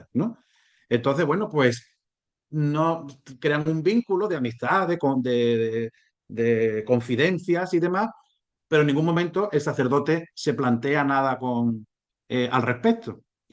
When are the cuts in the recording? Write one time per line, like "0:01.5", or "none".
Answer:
none

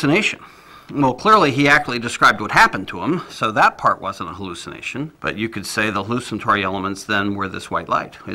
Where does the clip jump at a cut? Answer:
0:05.1

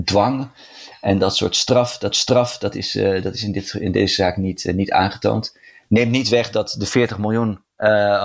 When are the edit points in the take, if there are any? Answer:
0:02.1

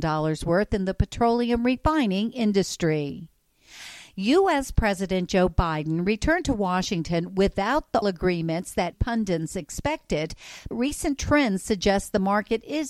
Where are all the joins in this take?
0:08.0
0:08.9
0:10.7

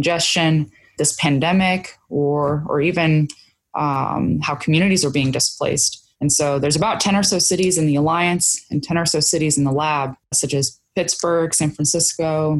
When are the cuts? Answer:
0:06.1

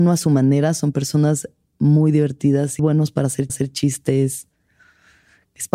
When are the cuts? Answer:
0:02.8
0:03.5

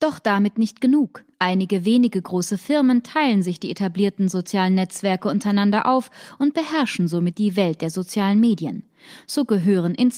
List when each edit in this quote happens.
0:01.3

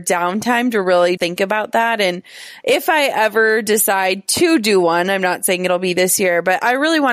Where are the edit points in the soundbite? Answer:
0:01.2

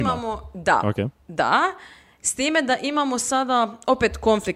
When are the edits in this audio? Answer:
none

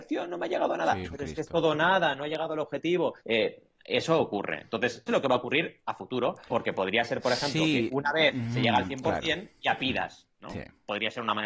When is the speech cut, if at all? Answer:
0:01.0
0:03.2
0:05.1
0:06.5

